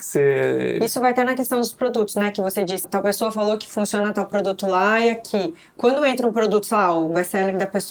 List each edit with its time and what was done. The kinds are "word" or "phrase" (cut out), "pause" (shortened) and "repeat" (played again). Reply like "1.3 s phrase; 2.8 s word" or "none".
2.8 s word